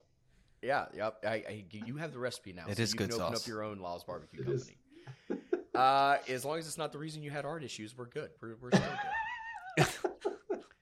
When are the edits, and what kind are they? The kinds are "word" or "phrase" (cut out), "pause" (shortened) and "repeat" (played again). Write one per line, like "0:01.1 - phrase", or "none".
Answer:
0:08.4 - pause

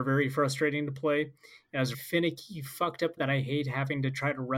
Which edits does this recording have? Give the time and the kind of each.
0:01.9 - word
0:03.2 - word

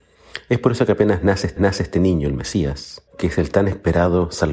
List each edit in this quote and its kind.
0:01.6 - repeat
0:03.1 - pause

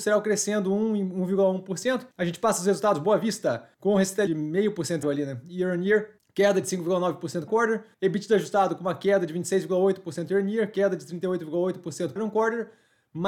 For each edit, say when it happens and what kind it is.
0:02.1 - pause
0:03.7 - pause
0:04.3 - phrase
0:05.0 - word
0:06.2 - pause
0:07.5 - phrase
0:07.9 - pause
0:12.2 - word

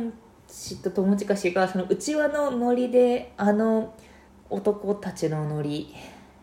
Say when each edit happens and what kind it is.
0:04.3 - pause

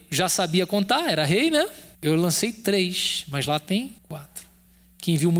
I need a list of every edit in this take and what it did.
0:01.9 - pause
0:04.0 - pause

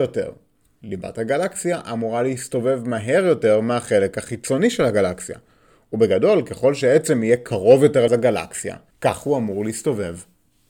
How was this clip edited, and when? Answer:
0:08.1 - word
0:08.9 - pause

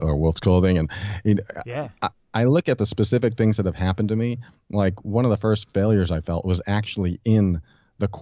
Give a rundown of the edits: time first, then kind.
none

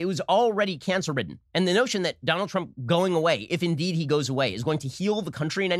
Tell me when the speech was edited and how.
0:01.5 - pause

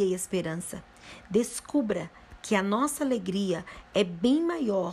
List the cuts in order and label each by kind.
none

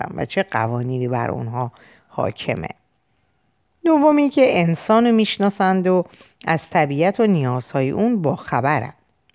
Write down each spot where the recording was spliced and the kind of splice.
none

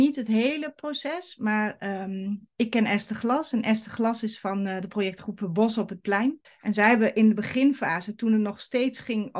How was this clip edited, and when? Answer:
0:06.4 - pause

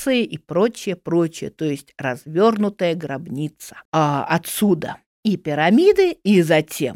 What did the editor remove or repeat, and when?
0:03.8 - pause

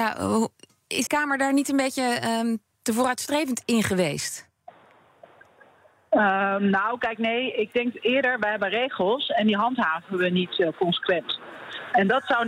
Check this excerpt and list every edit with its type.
0:01.1 - phrase

